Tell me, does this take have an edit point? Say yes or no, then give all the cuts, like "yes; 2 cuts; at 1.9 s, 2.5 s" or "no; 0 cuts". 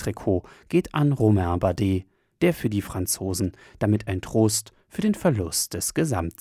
no; 0 cuts